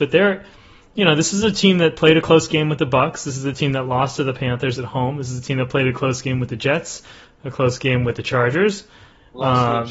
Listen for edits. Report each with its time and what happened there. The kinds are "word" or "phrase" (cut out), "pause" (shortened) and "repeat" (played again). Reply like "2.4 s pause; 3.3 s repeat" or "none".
none